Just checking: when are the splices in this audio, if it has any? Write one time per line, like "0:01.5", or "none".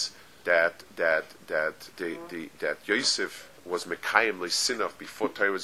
0:01.9
0:03.6